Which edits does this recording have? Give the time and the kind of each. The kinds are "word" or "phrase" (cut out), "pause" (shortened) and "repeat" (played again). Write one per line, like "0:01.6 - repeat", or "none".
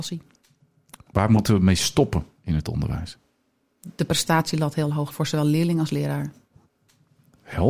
0:05.1 - word